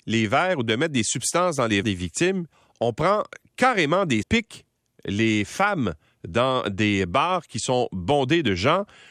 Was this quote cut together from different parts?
yes; 3 cuts; at 1.8 s, 2.5 s, 4.2 s

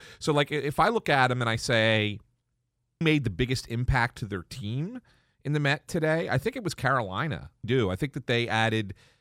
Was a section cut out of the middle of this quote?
yes; 2 cuts; at 3.0 s, 7.6 s

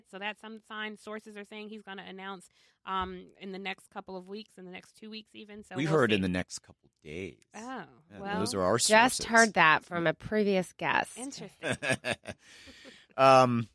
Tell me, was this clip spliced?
no; 0 cuts

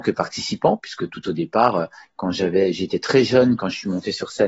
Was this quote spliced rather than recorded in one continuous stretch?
no; 0 cuts

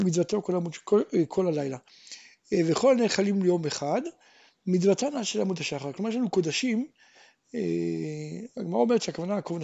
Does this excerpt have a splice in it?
no; 0 cuts

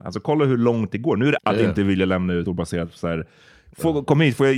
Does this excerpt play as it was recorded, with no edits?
no; 2 cuts; at 1.4 s, 2.5 s

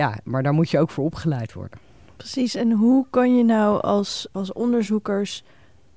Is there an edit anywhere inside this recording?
no; 0 cuts

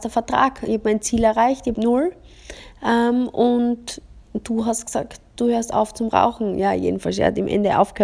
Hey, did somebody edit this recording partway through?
yes; 1 cut; at 1.7 s

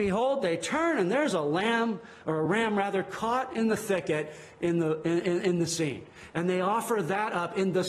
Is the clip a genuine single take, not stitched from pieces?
yes; 0 cuts

